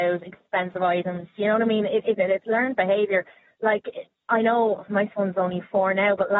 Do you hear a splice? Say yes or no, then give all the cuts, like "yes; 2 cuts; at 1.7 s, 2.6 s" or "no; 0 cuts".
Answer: yes; 1 cut; at 2.2 s